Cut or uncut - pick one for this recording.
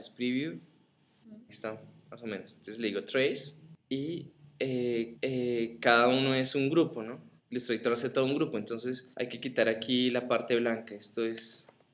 cut